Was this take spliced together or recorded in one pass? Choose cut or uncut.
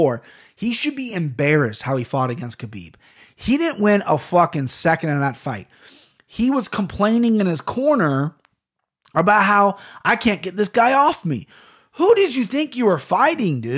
uncut